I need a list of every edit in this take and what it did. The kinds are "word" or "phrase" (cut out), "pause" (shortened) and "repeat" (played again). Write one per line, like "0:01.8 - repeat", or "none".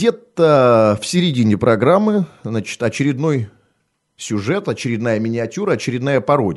none